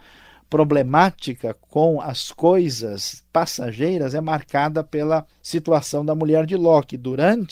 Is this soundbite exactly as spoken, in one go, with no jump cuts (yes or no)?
no